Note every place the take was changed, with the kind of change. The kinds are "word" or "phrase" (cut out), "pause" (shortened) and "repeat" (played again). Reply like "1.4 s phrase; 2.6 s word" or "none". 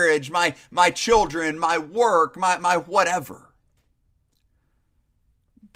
none